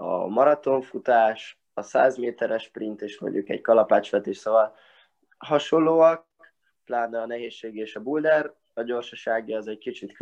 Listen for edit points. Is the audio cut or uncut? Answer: uncut